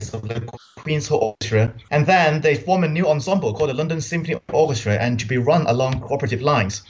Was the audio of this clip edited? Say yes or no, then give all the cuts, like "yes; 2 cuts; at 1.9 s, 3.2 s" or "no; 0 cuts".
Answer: no; 0 cuts